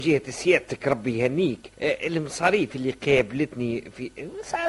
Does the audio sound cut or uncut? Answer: cut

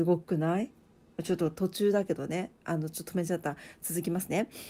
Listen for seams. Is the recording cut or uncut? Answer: uncut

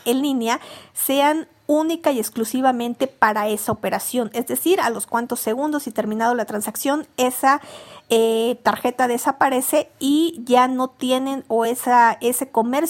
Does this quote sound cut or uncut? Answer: uncut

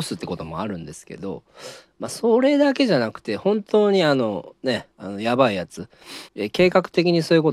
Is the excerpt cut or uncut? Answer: cut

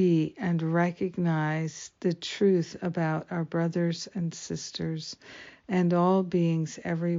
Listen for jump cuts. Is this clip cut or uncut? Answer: uncut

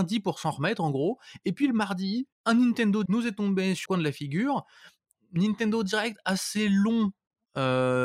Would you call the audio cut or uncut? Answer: cut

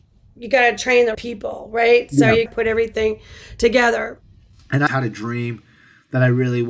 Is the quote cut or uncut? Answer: cut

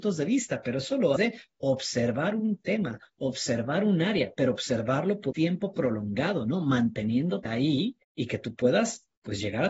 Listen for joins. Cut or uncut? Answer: cut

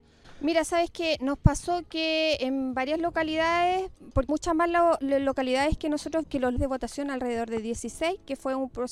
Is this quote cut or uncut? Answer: cut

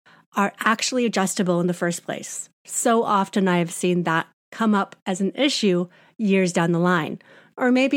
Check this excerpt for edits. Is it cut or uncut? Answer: uncut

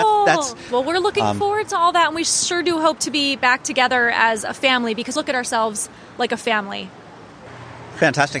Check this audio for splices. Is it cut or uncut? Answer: cut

